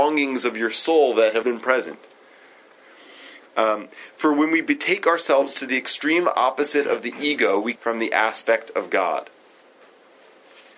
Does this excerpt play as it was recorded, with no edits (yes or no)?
no